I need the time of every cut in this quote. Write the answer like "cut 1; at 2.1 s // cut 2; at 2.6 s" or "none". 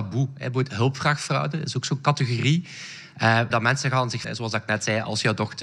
cut 1; at 3.5 s // cut 2; at 4.2 s